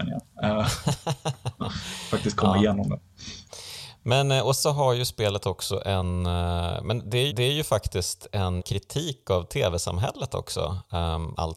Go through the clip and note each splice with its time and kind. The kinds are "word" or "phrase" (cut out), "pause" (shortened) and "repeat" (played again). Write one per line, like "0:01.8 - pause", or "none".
0:04.6 - word
0:07.3 - repeat
0:08.6 - word